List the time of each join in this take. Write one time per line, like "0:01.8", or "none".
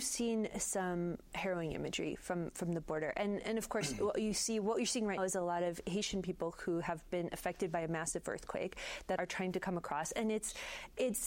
0:05.2
0:09.2